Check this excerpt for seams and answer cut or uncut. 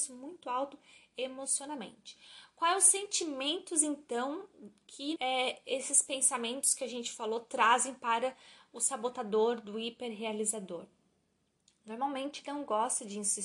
cut